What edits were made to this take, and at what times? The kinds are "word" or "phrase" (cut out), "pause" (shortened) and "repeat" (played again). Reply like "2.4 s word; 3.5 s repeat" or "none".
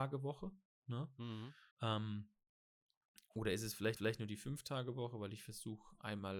1.7 s pause; 4.0 s repeat

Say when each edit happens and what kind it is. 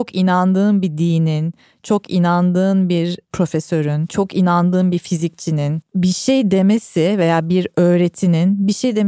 none

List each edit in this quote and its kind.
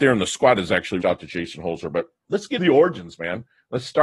1.0 s word; 2.2 s word; 2.6 s word

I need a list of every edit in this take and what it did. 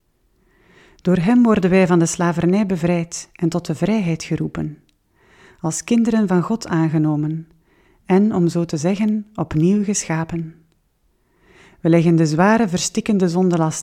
none

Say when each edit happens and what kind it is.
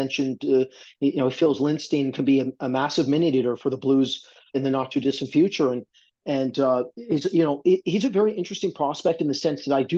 4.5 s word

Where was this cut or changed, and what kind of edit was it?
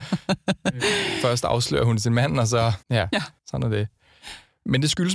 2.8 s pause; 3.4 s pause

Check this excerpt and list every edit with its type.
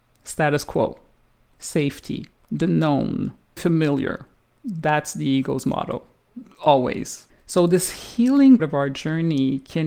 2.3 s pause; 3.6 s word; 8.6 s word

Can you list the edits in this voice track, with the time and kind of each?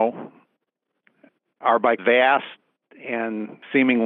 2.0 s word

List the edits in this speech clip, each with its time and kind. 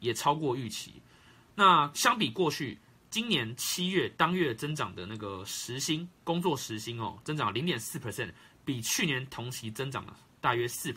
none

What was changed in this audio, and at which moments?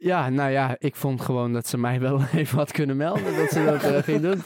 none

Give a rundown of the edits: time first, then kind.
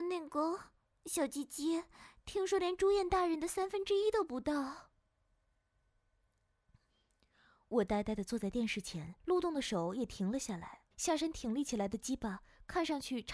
9.2 s pause; 10.9 s pause

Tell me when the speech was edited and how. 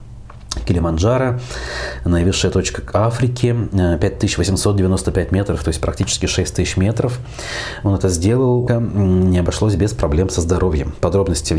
8.7 s word

